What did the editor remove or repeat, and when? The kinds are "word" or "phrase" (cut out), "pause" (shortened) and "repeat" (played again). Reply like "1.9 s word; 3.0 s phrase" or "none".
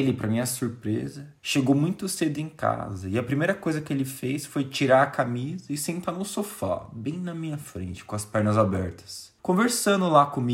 1.4 s pause; 9.4 s pause